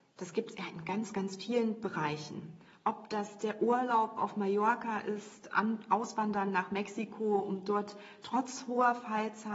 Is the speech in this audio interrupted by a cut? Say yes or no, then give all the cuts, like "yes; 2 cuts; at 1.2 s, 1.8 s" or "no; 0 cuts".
no; 0 cuts